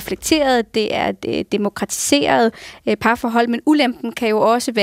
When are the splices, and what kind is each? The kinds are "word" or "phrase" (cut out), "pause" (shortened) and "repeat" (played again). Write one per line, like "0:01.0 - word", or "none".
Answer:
none